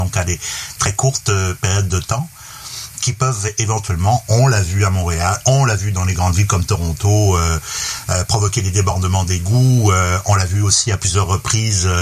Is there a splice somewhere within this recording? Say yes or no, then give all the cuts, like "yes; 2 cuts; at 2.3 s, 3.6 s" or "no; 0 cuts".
no; 0 cuts